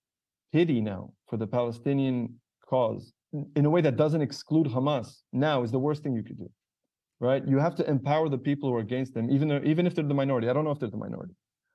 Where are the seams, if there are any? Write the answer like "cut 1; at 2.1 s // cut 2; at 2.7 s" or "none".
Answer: cut 1; at 3.2 s // cut 2; at 5.3 s